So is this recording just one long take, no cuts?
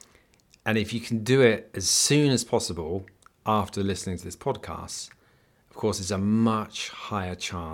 yes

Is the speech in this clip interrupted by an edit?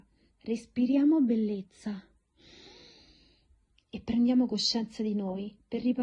no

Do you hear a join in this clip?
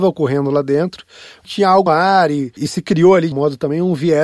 yes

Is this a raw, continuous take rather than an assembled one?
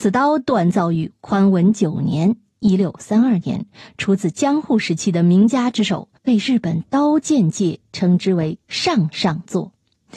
no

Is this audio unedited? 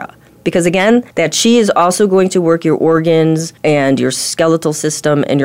no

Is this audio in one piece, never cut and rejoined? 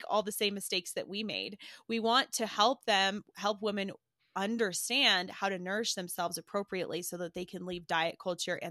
yes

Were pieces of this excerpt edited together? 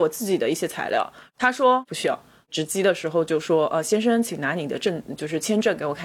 no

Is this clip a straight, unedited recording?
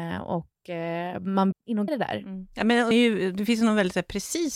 no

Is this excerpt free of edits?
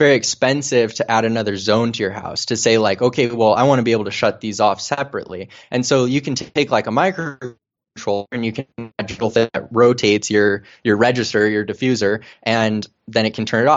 no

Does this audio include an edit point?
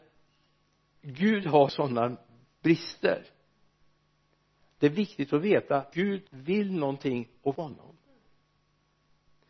yes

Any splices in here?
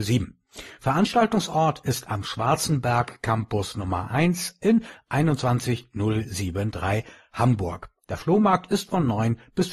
no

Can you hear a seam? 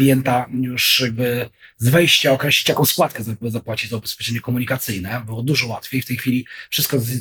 no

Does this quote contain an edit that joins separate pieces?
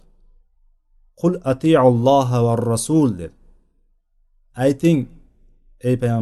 no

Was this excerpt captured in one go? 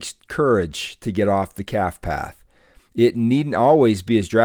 yes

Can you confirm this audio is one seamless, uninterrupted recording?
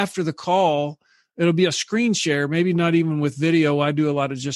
yes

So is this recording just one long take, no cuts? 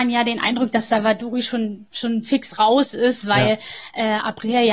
yes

